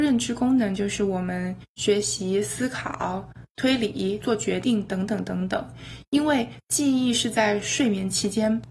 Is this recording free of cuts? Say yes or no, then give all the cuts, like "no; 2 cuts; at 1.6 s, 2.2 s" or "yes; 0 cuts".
no; 1 cut; at 4.2 s